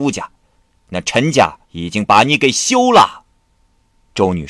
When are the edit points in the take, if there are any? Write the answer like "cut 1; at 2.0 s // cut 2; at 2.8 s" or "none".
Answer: cut 1; at 1.6 s